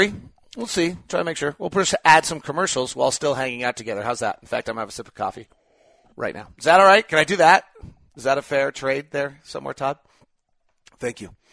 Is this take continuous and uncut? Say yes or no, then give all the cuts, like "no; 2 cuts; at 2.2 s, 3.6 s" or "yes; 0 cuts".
yes; 0 cuts